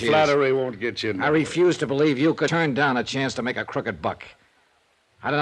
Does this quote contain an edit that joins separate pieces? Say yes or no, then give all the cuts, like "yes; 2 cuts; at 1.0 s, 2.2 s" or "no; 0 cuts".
no; 0 cuts